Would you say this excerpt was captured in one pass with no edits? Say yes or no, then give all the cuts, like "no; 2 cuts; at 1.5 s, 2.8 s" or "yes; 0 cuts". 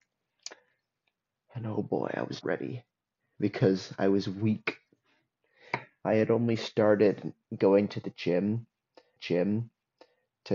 no; 2 cuts; at 2.4 s, 9.2 s